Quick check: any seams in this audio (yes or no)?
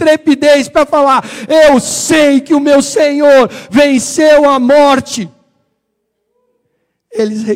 no